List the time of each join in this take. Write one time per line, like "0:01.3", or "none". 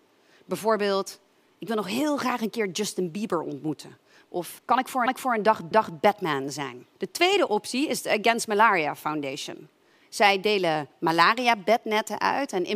0:04.6
0:05.1
0:05.7
0:06.9